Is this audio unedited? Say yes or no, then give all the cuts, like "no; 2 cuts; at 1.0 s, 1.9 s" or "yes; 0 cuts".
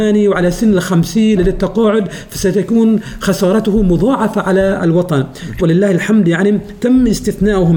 no; 2 cuts; at 1.4 s, 5.6 s